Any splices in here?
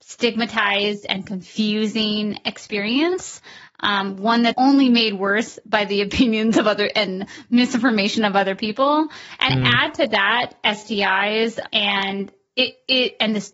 yes; 4 cuts; at 4.5 s, 6.9 s, 9.5 s, 11.7 s

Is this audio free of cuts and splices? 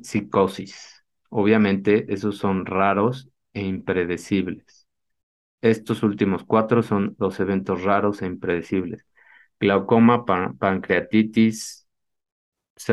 yes; 0 cuts

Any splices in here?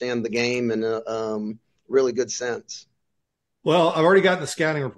no; 0 cuts

